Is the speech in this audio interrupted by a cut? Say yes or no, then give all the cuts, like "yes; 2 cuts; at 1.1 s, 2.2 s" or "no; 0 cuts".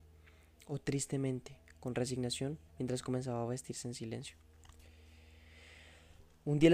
yes; 1 cut; at 2.7 s